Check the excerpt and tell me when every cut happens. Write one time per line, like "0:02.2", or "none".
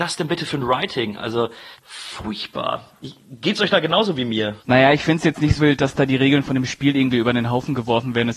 0:01.7
0:04.6
0:05.6